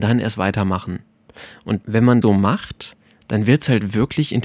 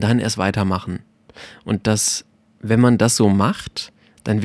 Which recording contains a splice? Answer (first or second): first